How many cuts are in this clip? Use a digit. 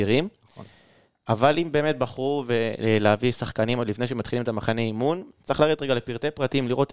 0